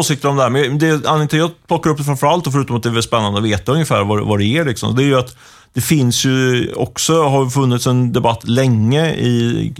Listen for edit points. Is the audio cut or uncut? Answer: uncut